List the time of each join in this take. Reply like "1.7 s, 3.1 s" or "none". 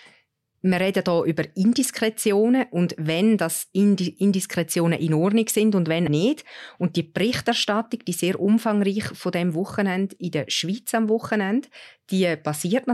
6.1 s

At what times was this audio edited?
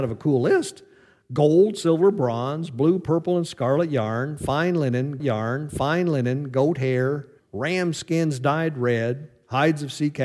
5.2 s, 7.4 s

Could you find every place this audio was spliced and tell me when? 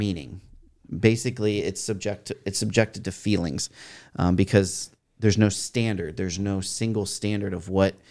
none

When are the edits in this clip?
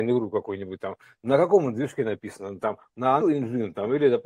3.2 s

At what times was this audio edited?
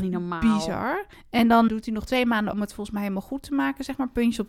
1.1 s, 1.7 s, 2.5 s

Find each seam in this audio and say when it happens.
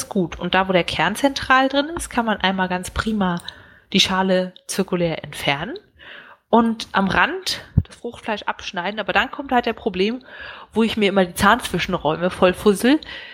none

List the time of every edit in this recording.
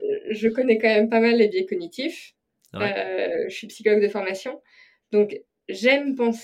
none

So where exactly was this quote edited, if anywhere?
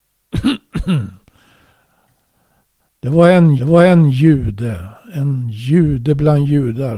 3.6 s

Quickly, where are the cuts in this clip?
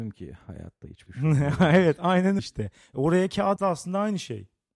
1.1 s, 2.4 s, 3.6 s

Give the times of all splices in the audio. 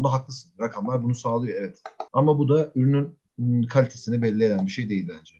2.1 s

